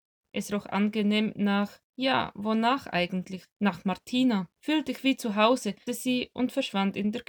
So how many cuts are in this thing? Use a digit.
4